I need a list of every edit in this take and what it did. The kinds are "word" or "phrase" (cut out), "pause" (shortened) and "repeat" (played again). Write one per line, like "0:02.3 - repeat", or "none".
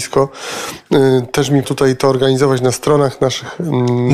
0:01.6 - word